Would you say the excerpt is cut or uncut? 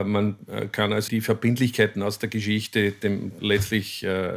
cut